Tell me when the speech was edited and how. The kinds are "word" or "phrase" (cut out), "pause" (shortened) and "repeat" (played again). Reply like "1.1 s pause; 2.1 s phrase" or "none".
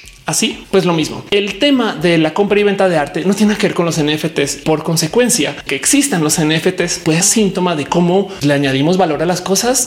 4.6 s word; 5.7 s word; 7.2 s phrase; 8.4 s word